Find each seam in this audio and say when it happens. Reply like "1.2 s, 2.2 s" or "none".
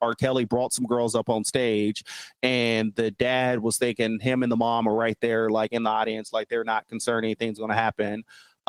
none